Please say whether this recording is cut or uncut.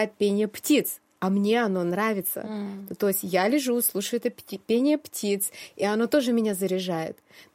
uncut